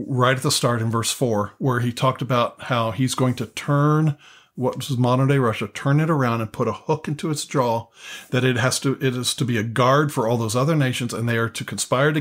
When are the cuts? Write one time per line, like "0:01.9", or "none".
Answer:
none